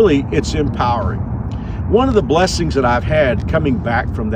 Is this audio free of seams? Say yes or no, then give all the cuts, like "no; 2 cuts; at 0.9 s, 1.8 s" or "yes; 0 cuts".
yes; 0 cuts